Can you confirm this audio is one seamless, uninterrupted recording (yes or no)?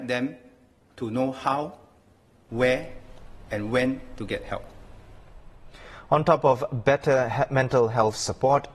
yes